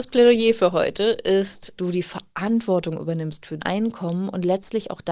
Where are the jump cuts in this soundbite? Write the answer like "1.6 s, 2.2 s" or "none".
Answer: 1.8 s, 3.6 s